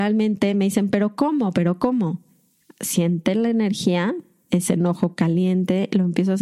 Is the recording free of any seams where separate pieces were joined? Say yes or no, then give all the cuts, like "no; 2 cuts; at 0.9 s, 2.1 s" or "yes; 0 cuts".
yes; 0 cuts